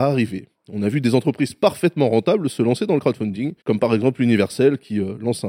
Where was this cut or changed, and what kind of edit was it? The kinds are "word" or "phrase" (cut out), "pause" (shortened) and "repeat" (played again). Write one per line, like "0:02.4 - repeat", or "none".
0:03.6 - pause